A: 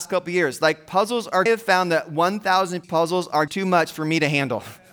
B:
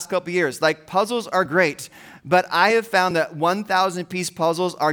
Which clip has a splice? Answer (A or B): A